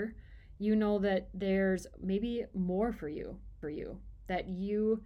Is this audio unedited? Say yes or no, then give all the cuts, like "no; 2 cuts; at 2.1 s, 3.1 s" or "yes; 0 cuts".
no; 1 cut; at 3.6 s